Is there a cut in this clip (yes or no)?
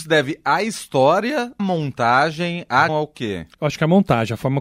yes